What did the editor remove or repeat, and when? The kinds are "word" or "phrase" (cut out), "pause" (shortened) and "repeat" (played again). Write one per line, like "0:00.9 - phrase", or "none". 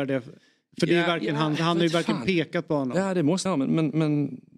0:03.5 - word